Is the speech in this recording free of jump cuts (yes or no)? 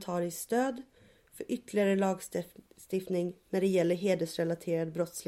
yes